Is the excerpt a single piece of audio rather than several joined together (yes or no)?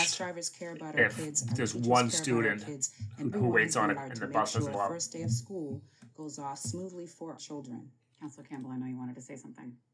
no